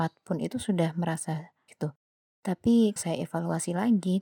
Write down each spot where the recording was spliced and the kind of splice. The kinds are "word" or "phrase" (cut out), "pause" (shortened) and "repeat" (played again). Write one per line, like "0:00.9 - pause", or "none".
0:01.7 - word
0:03.0 - word